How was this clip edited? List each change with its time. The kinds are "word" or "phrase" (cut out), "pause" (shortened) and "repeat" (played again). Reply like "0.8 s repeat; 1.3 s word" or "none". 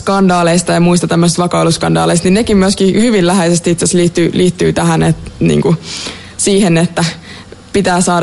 none